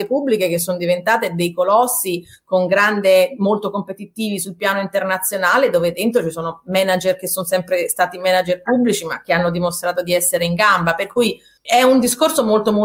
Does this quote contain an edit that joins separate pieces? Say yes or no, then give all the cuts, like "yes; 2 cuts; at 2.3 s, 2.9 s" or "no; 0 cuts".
no; 0 cuts